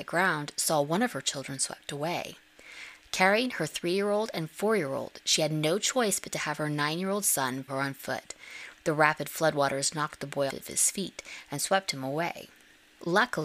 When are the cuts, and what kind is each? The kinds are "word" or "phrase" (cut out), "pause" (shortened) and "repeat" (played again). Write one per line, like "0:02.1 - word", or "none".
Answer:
0:07.7 - word
0:10.5 - word